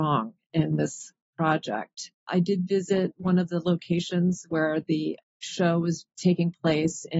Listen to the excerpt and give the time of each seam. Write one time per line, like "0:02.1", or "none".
0:02.2